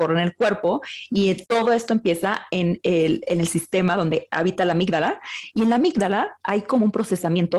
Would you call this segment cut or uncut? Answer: uncut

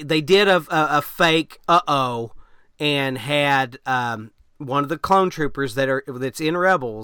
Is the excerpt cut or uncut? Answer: uncut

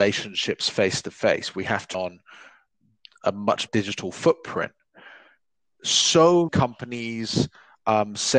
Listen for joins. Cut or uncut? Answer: cut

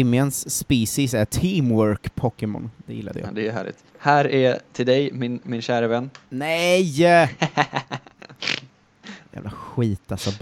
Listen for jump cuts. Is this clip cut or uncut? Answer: cut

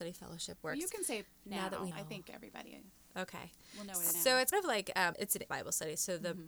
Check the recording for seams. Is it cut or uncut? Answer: cut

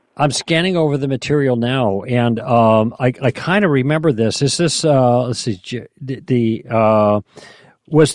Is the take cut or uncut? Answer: cut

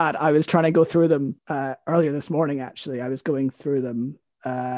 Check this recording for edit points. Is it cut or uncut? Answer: cut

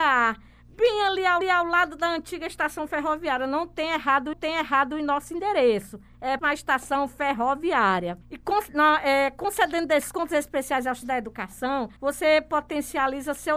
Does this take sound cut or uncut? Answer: cut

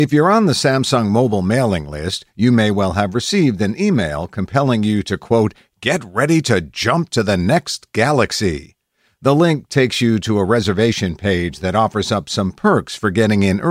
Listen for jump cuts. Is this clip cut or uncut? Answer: uncut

